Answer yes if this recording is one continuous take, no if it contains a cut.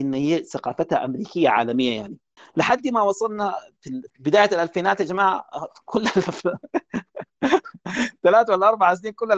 no